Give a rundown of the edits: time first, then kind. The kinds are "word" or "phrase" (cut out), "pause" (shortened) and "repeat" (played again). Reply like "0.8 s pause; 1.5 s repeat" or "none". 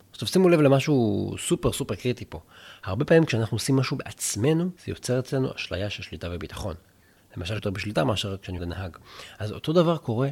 4.8 s pause; 7.6 s phrase; 8.6 s phrase